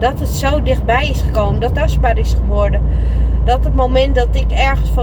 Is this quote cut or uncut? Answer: cut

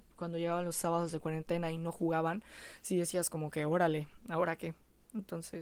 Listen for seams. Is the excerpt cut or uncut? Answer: uncut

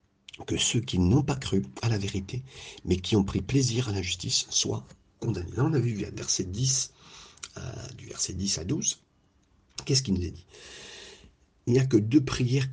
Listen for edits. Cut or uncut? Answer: uncut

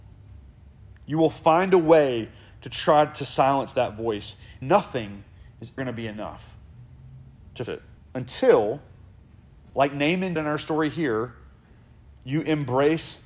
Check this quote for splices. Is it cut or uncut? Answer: cut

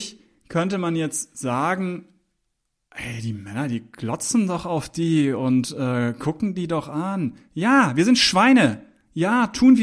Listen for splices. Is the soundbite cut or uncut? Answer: uncut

